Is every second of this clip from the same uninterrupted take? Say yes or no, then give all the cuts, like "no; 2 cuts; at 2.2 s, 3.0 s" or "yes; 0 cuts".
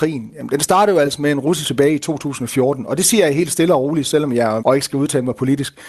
no; 2 cuts; at 1.6 s, 4.6 s